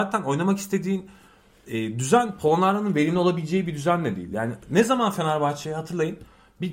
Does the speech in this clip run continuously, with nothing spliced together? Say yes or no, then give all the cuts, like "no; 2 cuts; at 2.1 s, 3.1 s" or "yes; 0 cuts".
yes; 0 cuts